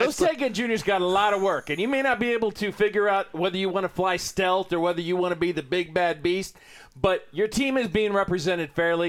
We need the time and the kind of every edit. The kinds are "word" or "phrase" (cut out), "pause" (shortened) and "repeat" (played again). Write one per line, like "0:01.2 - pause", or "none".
none